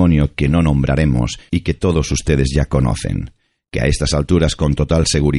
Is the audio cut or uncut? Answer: uncut